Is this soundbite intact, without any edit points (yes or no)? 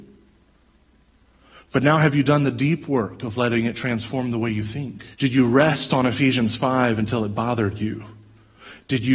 no